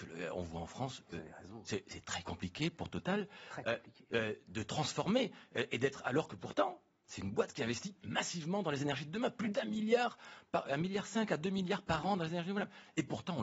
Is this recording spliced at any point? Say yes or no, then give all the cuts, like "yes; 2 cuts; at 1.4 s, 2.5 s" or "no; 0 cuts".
no; 0 cuts